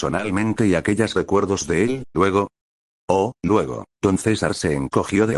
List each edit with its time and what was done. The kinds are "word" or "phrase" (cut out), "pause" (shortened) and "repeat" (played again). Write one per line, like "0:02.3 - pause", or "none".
0:01.1 - phrase
0:02.1 - word
0:03.9 - pause